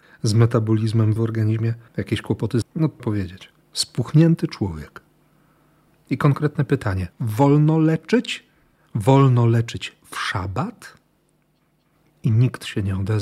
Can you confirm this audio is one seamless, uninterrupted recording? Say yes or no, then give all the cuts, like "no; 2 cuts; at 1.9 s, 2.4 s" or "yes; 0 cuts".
no; 6 cuts; at 1.2 s, 1.9 s, 2.6 s, 3.0 s, 3.6 s, 7.1 s